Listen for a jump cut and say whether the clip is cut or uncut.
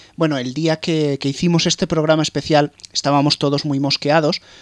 uncut